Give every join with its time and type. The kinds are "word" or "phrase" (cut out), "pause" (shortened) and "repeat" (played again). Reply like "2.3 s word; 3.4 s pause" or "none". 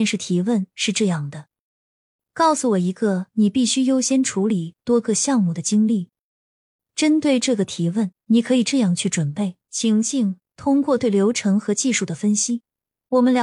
8.2 s pause; 9.6 s pause